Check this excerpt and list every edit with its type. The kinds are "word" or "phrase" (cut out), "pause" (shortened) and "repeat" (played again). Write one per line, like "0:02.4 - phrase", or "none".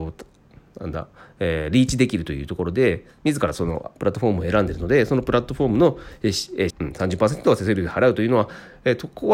0:06.7 - phrase